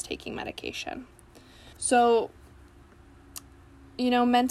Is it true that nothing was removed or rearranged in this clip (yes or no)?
no